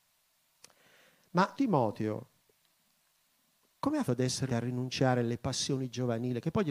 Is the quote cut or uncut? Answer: cut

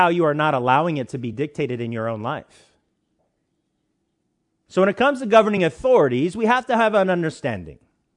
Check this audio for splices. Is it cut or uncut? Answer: uncut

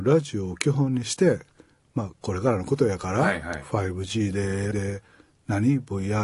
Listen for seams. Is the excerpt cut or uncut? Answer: cut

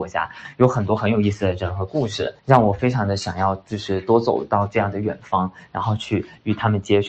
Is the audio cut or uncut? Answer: cut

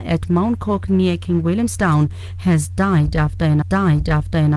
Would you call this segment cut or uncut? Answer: cut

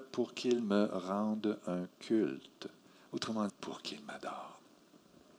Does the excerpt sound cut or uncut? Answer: cut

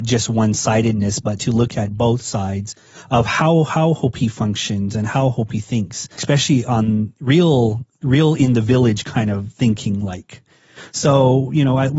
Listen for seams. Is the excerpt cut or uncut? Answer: cut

